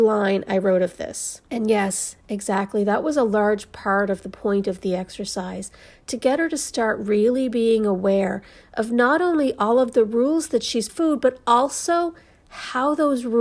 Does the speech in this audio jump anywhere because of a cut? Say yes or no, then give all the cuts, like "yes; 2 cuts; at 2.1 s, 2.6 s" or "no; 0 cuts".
yes; 2 cuts; at 1.5 s, 10.9 s